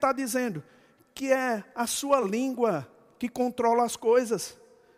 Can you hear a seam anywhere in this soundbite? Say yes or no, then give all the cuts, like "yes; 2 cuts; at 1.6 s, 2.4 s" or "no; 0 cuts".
no; 0 cuts